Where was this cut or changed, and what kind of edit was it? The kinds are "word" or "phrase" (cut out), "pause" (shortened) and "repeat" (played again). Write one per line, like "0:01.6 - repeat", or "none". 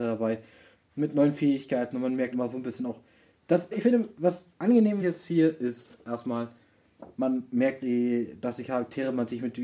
0:02.3 - word
0:03.7 - word
0:05.0 - word
0:07.8 - word